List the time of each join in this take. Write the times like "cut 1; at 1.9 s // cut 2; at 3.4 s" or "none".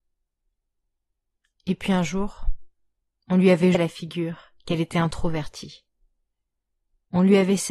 cut 1; at 3.7 s